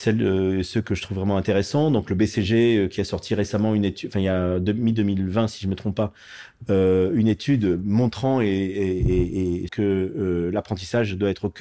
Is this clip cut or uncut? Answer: cut